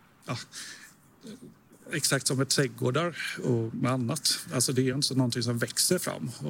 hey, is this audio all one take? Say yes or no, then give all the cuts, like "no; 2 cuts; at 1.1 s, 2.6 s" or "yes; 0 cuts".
yes; 0 cuts